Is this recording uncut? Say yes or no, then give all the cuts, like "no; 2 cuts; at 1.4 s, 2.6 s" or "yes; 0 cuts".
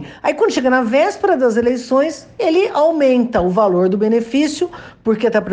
yes; 0 cuts